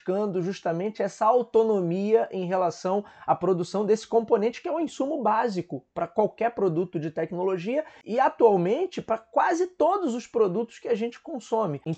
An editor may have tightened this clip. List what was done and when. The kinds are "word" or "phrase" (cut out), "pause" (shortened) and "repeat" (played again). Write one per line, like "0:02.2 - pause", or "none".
none